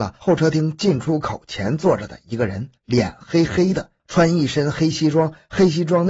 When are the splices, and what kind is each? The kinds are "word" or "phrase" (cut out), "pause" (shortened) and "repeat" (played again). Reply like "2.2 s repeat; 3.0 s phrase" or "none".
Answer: 2.8 s pause

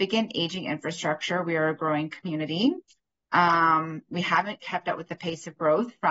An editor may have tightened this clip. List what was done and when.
none

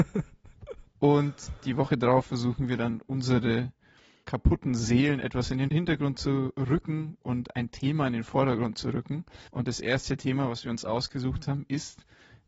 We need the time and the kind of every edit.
4.2 s word; 5.7 s word; 9.5 s pause

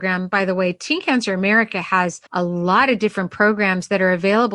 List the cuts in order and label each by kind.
2.3 s pause

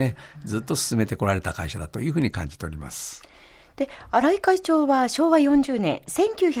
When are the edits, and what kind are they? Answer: none

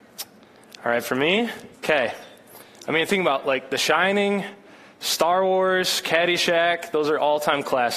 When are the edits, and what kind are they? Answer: 1.7 s pause

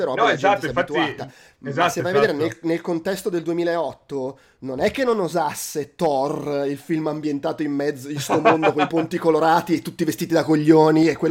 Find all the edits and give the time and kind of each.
none

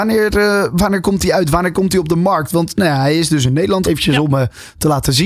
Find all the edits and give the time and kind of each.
3.8 s word

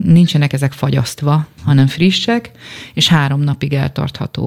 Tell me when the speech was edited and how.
none

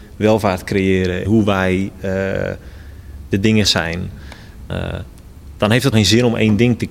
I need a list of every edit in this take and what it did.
1.2 s word; 3.6 s word; 4.7 s word; 5.9 s word

